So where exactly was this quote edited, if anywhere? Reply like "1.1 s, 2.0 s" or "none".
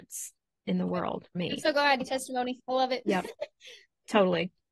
1.3 s, 2.0 s